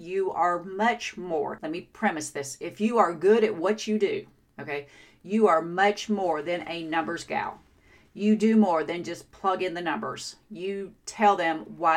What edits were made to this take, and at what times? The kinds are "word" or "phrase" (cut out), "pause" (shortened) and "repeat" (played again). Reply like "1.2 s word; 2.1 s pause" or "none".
none